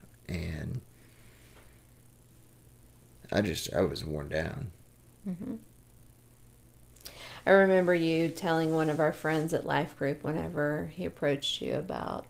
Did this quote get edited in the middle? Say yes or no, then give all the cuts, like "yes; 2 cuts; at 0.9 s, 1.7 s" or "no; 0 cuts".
no; 0 cuts